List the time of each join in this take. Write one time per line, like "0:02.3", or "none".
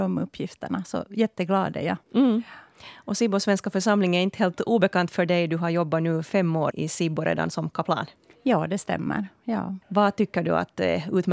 0:02.0
0:06.7
0:09.8